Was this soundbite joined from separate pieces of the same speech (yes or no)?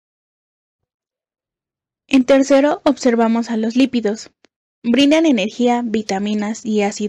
no